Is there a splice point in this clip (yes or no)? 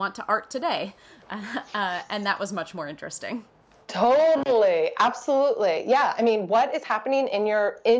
no